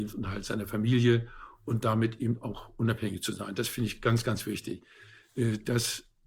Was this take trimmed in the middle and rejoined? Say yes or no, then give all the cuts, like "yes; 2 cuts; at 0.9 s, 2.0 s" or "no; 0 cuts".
no; 0 cuts